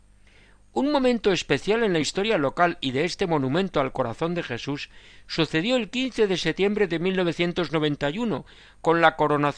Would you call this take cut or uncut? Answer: uncut